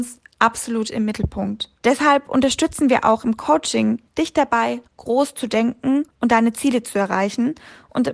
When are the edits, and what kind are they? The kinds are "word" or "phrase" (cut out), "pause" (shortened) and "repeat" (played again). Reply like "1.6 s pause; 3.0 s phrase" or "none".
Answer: 1.8 s pause; 4.1 s pause; 4.9 s pause; 6.1 s pause